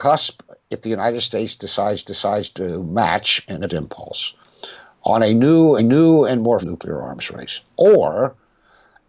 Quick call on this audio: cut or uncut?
cut